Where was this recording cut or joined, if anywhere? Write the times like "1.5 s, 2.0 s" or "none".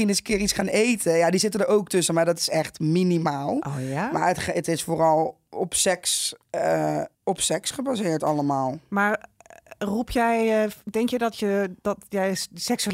7.1 s